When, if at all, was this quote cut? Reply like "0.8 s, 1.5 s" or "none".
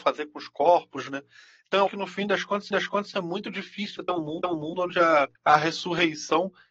1.9 s, 2.7 s, 4.0 s, 4.4 s, 5.4 s